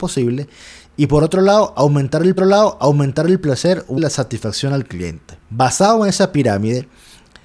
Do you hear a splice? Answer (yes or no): yes